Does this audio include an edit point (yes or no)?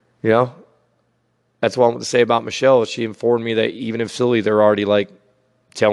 no